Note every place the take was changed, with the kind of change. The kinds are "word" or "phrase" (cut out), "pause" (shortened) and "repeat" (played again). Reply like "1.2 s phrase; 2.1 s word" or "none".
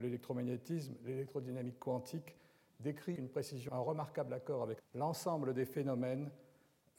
3.2 s word; 3.7 s word; 4.8 s word